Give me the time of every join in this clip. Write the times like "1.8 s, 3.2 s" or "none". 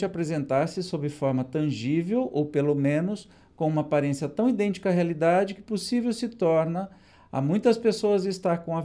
none